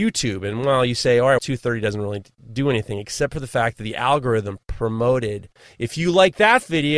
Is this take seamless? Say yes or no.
no